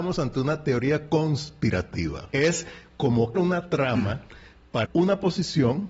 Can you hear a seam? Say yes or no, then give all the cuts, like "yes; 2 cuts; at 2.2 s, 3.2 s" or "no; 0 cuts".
yes; 3 cuts; at 2.3 s, 3.3 s, 4.8 s